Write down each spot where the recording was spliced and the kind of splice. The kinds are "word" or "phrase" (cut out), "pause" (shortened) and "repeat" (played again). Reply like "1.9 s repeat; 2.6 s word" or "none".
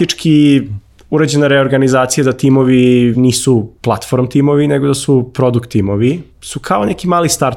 3.1 s word; 3.8 s pause; 6.3 s word